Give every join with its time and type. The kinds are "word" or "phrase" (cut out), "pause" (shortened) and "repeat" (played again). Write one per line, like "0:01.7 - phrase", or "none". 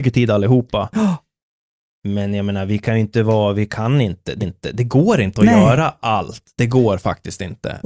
0:04.4 - repeat